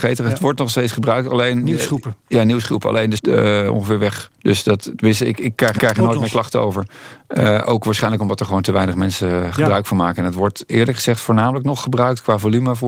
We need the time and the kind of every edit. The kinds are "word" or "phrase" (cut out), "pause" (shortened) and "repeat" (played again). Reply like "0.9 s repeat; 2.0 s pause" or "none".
3.2 s phrase; 4.3 s pause; 5.8 s repeat